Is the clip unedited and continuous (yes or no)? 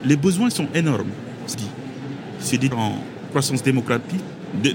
no